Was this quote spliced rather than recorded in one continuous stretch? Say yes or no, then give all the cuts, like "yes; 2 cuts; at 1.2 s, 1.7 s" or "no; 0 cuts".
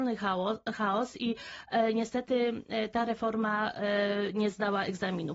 no; 0 cuts